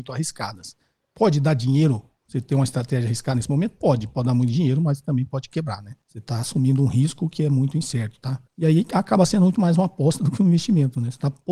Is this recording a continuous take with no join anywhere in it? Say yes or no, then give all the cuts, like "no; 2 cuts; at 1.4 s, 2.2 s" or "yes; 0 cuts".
no; 2 cuts; at 6.0 s, 8.5 s